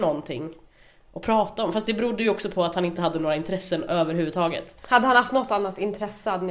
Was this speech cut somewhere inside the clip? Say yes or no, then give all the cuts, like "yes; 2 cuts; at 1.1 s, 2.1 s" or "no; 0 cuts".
no; 0 cuts